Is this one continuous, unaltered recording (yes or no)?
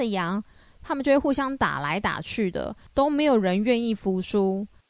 no